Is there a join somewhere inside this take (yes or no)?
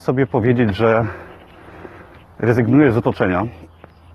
no